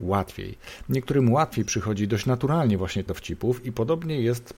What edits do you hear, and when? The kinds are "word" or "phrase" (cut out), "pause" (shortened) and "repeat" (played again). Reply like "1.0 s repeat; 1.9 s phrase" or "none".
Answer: 3.1 s word